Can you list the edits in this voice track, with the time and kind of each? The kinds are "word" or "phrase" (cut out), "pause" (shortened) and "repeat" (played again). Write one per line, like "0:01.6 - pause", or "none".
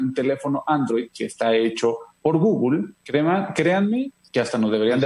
0:02.9 - pause